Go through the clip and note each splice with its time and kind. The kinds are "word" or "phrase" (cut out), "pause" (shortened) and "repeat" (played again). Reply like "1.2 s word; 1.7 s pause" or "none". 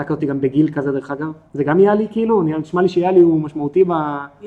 1.5 s pause